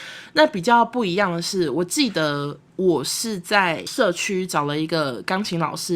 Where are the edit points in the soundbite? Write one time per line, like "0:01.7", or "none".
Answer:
0:02.6